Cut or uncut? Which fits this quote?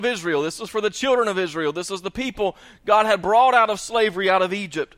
uncut